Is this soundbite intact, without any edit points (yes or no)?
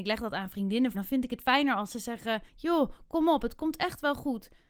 no